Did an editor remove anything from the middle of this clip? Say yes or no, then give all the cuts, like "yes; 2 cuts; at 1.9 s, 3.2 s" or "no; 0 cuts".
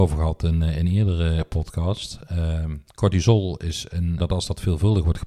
yes; 2 cuts; at 2.9 s, 4.2 s